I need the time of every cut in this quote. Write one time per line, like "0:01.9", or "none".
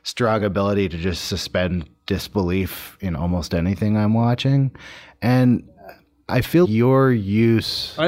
0:06.6